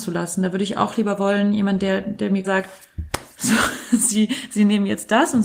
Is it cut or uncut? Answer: cut